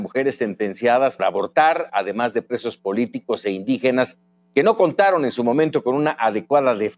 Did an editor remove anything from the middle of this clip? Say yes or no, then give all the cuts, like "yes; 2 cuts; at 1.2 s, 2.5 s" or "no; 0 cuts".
yes; 1 cut; at 1.2 s